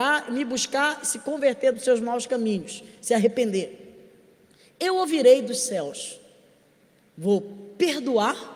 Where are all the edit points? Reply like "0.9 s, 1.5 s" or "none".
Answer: none